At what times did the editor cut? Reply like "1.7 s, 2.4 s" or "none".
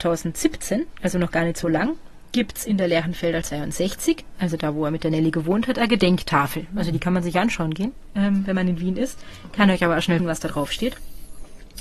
3.4 s, 10.2 s